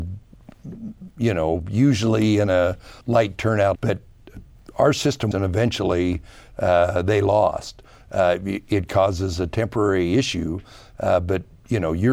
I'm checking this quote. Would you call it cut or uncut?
cut